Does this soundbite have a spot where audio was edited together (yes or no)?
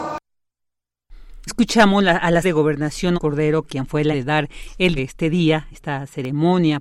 yes